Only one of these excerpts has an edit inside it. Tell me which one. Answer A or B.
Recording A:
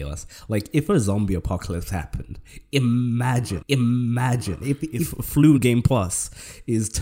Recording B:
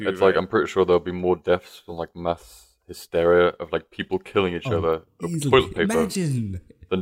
A